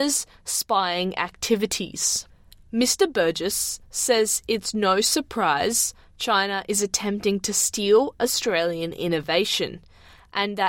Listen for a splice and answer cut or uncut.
uncut